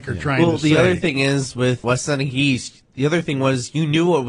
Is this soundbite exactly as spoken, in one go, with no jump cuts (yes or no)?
no